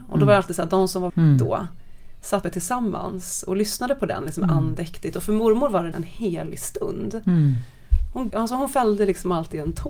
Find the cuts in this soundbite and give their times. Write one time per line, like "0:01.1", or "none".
0:01.1
0:02.4
0:05.9
0:08.3